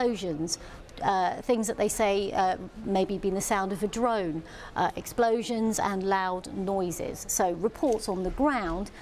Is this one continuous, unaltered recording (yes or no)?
yes